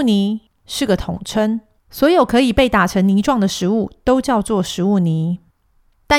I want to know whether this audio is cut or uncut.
cut